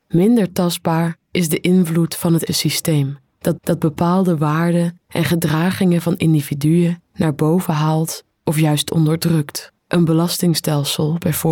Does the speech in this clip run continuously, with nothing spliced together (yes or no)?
no